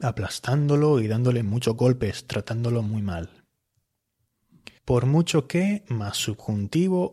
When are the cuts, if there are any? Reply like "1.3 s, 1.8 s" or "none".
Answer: 4.8 s